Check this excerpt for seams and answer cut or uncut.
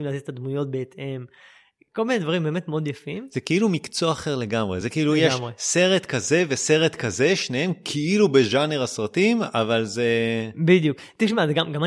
uncut